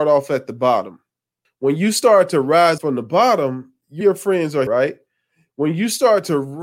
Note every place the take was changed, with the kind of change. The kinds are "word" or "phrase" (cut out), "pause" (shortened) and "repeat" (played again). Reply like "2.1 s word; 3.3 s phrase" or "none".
1.4 s pause; 2.8 s word; 4.0 s word; 4.7 s word